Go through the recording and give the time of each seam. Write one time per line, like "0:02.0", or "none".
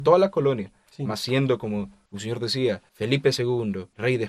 none

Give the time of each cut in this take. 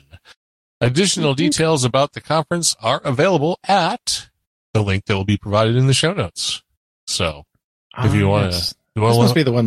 none

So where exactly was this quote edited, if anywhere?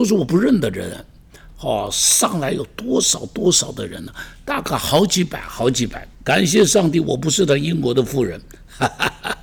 0:06.1

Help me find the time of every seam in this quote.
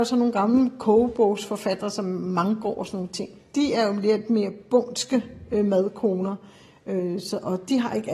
none

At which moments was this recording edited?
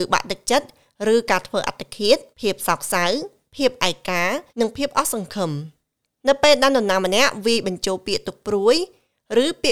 0:02.3
0:04.5

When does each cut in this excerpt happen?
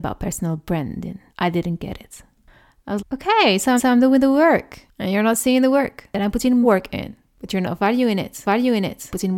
0:01.3
0:03.0
0:03.8
0:06.6
0:08.4

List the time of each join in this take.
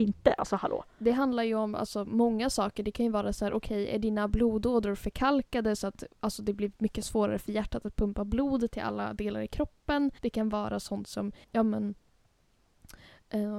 0:10.2
0:11.4

